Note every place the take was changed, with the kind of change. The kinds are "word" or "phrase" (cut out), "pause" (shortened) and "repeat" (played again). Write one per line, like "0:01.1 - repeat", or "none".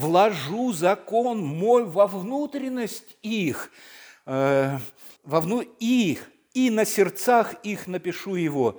0:05.2 - pause